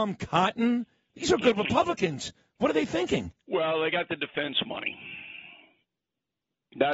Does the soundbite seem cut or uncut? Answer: uncut